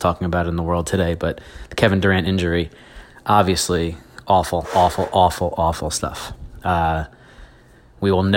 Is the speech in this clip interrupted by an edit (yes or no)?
no